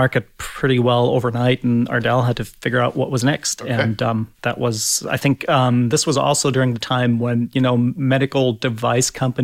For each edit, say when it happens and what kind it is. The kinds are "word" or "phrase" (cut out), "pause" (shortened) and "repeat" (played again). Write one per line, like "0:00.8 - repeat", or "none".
0:04.3 - pause